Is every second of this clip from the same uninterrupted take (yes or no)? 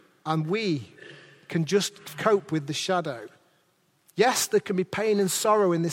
yes